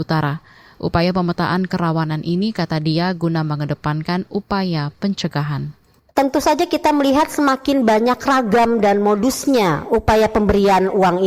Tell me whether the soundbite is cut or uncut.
uncut